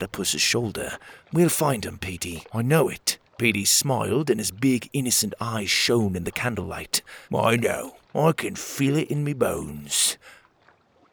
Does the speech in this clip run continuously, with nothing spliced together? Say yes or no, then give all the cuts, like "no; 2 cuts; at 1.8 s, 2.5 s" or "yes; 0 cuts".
no; 5 cuts; at 1.2 s, 2.5 s, 3.3 s, 7.2 s, 8.0 s